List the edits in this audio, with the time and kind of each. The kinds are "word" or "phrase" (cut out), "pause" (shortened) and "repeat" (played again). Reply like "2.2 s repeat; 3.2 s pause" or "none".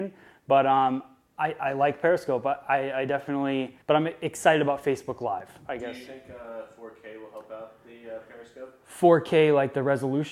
3.8 s pause